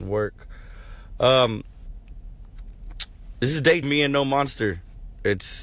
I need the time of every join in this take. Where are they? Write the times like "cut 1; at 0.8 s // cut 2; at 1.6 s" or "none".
cut 1; at 3.8 s